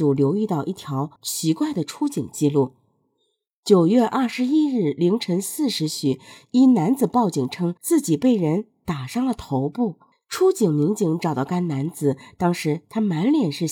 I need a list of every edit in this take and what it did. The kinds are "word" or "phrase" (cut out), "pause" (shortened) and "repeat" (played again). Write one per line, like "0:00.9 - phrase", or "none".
0:01.2 - pause
0:07.8 - pause
0:10.1 - pause